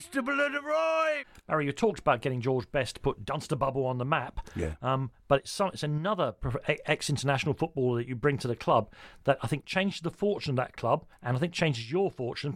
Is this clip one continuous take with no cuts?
no; 1 cut; at 11.1 s

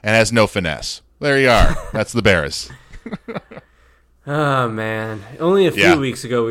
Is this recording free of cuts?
yes; 0 cuts

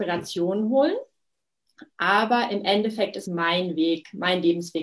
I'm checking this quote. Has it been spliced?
yes; 1 cut; at 3.2 s

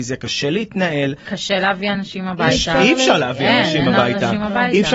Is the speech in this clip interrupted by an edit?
no; 0 cuts

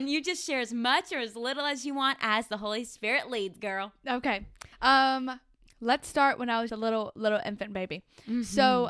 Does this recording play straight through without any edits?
no; 2 cuts; at 4.7 s, 6.7 s

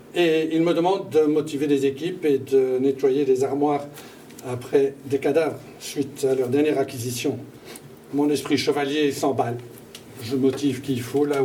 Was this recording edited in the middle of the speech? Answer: yes; 1 cut; at 8.0 s

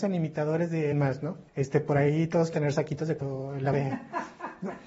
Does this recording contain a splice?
yes; 5 cuts; at 0.9 s, 1.5 s, 2.5 s, 3.2 s, 3.7 s

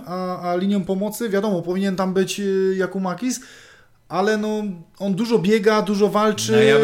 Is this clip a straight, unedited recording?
yes; 0 cuts

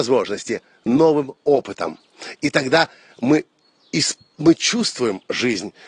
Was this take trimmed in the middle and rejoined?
no; 0 cuts

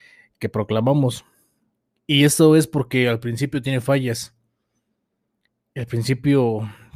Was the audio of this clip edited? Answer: no; 0 cuts

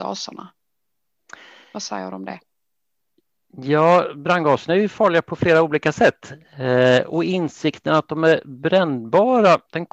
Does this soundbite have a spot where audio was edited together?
no; 0 cuts

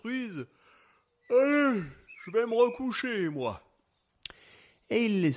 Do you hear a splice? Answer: no; 0 cuts

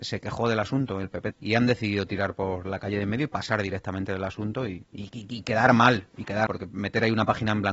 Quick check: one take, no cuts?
no; 3 cuts; at 1.3 s, 4.9 s, 6.5 s

